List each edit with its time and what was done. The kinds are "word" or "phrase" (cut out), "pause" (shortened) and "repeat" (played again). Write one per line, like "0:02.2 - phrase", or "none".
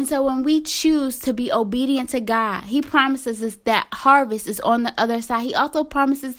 none